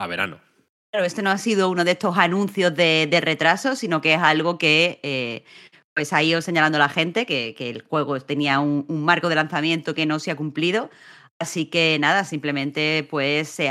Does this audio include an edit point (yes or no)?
no